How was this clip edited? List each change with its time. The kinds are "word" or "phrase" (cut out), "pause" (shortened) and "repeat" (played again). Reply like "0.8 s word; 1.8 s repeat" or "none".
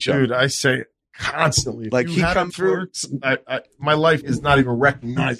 2.5 s word; 4.2 s word

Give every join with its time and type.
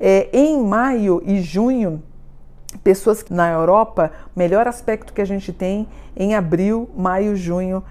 3.3 s word

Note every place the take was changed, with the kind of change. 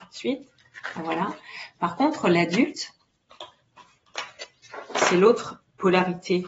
none

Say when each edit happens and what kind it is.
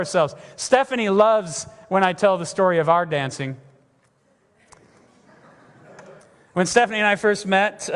6.2 s pause

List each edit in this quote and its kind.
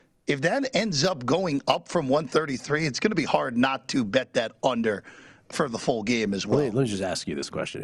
none

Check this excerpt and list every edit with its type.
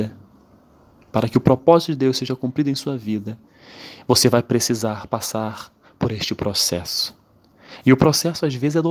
none

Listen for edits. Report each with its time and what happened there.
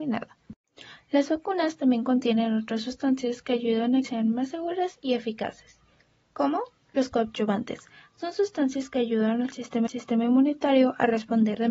4.0 s word; 9.9 s repeat

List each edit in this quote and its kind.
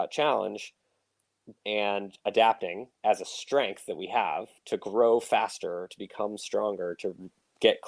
1.6 s pause; 3.0 s pause

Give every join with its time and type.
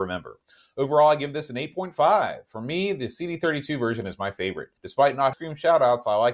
4.8 s pause; 5.3 s phrase

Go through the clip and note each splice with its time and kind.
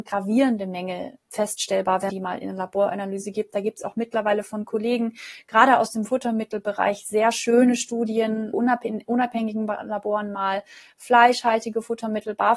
1.2 s word; 2.1 s word; 8.5 s word

